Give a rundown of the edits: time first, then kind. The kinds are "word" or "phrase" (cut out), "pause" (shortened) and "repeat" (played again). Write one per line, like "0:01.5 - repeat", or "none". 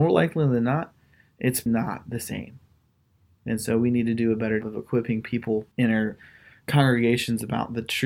0:01.7 - word
0:04.6 - word
0:05.7 - pause